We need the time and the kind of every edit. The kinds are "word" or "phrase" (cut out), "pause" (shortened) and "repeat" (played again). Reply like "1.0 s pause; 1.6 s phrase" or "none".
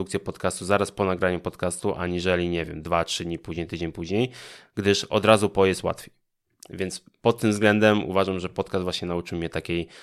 none